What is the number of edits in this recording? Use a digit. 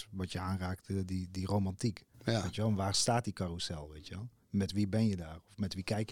1